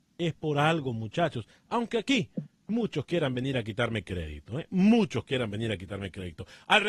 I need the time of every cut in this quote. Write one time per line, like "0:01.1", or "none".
none